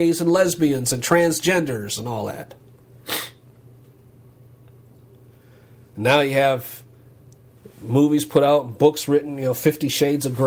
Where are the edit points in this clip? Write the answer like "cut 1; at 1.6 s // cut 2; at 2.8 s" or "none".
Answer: none